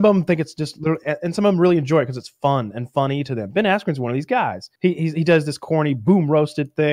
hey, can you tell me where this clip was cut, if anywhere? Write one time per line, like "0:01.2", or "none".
0:04.8